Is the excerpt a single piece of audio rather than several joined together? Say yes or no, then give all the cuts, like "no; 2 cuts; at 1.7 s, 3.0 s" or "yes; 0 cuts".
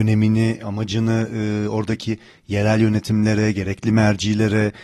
yes; 0 cuts